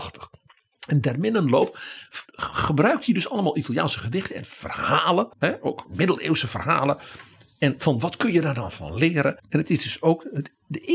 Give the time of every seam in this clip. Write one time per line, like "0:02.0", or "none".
0:02.3
0:05.3
0:09.4